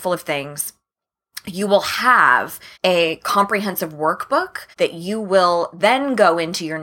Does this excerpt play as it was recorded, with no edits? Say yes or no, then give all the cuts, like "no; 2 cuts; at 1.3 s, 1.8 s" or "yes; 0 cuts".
no; 2 cuts; at 2.7 s, 4.7 s